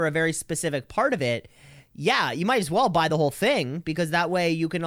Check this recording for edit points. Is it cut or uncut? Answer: uncut